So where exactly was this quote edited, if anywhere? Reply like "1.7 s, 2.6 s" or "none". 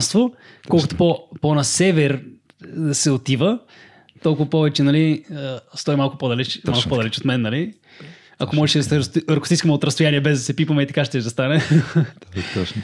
none